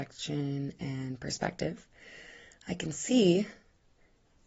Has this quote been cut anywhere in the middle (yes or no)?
no